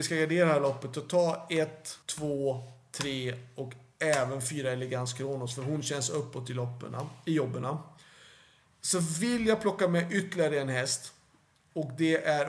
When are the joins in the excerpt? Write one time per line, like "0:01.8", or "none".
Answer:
0:02.0